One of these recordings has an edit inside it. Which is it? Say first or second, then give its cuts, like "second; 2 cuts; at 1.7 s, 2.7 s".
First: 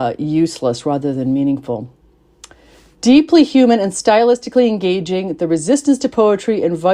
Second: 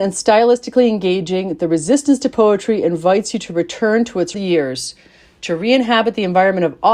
second; 1 cut; at 4.3 s